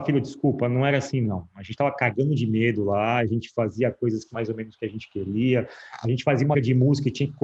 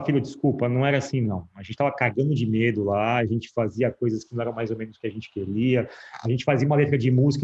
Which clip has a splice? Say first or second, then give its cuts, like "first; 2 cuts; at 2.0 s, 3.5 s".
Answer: first; 2 cuts; at 4.3 s, 6.5 s